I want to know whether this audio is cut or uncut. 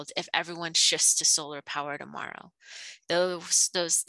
uncut